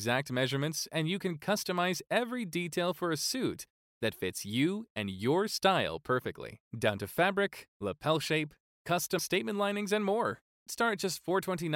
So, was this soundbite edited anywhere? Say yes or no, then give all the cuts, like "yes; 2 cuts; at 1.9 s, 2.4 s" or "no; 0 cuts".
yes; 3 cuts; at 6.7 s, 9.2 s, 10.7 s